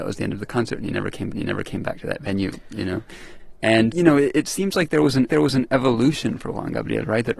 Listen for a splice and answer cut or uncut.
cut